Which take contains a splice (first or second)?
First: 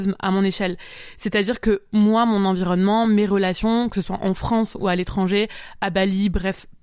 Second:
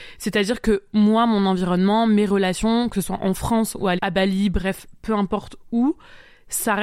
second